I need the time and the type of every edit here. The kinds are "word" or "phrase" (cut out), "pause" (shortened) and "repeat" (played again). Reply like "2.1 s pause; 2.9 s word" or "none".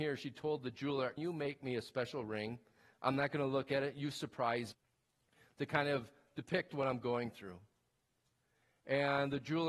1.2 s word; 4.7 s word